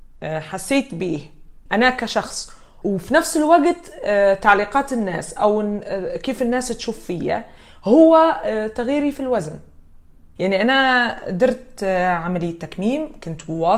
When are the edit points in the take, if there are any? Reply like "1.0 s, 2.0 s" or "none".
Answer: none